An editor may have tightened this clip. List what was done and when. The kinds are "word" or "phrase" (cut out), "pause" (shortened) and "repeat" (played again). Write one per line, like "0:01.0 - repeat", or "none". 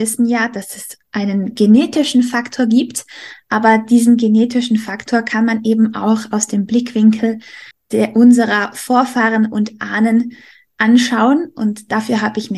0:07.7 - pause